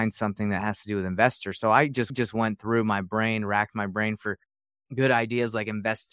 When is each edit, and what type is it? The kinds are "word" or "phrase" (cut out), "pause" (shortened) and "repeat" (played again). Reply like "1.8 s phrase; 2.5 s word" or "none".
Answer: 2.1 s repeat